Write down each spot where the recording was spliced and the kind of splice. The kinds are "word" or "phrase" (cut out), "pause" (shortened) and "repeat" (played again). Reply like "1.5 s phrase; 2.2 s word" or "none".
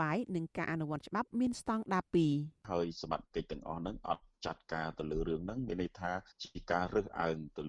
6.3 s pause